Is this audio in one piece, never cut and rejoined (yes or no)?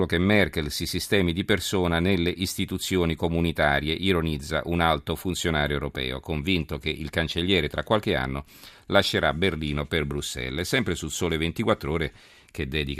yes